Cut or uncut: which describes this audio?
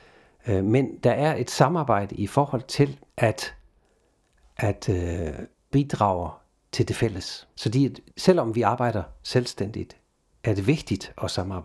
cut